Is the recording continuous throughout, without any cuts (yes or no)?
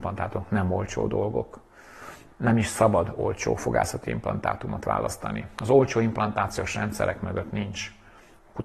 yes